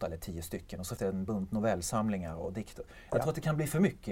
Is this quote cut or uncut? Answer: cut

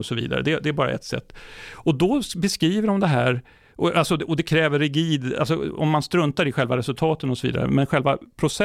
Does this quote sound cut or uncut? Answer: uncut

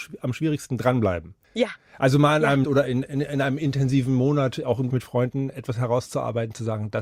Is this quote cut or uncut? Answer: cut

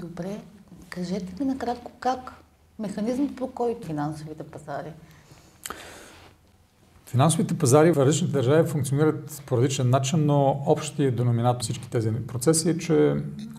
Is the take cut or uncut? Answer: cut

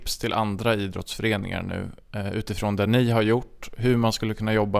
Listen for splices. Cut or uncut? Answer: uncut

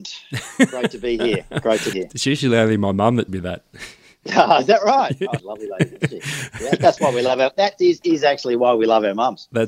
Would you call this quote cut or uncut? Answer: cut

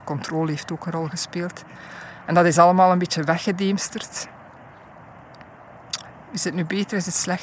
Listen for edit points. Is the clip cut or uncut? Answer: uncut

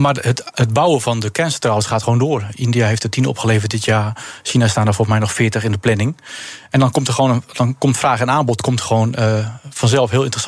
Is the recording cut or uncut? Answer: uncut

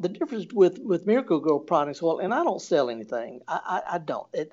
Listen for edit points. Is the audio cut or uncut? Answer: uncut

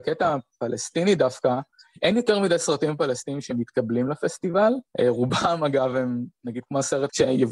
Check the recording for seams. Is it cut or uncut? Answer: uncut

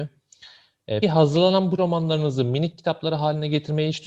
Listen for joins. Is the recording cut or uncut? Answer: cut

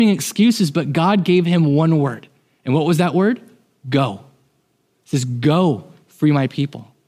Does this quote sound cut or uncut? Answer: uncut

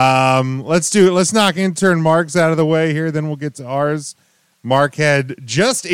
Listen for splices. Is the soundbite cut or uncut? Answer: uncut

